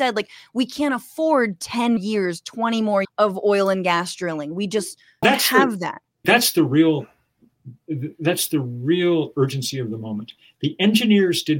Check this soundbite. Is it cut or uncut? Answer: cut